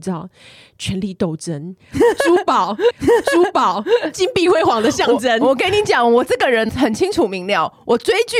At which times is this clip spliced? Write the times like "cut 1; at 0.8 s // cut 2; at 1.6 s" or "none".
cut 1; at 2.9 s // cut 2; at 6.7 s